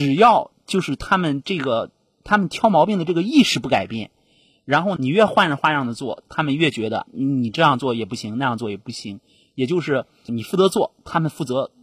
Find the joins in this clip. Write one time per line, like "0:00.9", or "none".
0:07.1
0:10.3